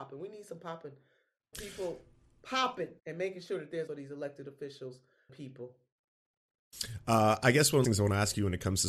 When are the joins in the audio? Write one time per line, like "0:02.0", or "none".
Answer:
0:01.5
0:03.0
0:03.9
0:05.3
0:07.8